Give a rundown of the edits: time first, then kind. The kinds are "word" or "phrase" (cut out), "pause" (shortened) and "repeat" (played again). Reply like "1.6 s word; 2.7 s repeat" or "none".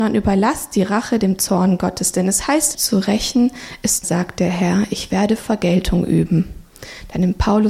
2.7 s phrase; 4.0 s phrase